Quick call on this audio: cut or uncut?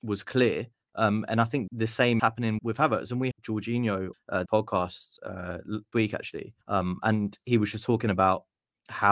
cut